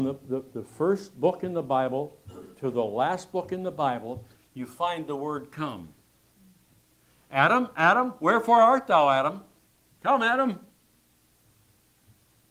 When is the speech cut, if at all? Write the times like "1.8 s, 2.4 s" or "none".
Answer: none